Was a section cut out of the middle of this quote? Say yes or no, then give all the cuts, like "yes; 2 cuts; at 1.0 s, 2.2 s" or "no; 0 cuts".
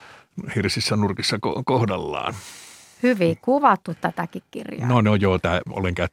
no; 0 cuts